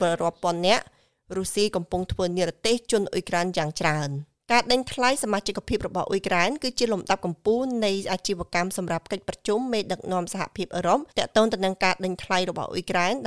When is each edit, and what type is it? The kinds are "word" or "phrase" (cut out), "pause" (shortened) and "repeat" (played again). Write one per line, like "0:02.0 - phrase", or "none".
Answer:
0:11.1 - pause